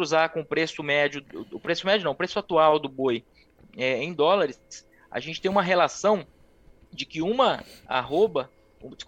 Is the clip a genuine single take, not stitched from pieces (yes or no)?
yes